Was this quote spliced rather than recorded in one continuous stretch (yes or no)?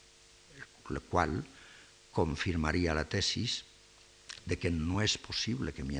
no